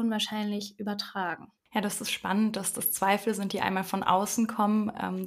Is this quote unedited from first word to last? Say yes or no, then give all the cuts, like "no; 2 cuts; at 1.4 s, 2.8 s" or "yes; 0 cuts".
no; 1 cut; at 1.6 s